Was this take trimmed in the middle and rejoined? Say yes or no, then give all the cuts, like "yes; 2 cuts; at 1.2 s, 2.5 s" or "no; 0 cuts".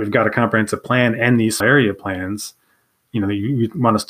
yes; 1 cut; at 1.6 s